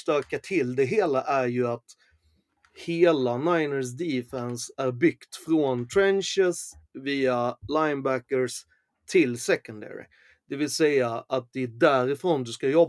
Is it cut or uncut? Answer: uncut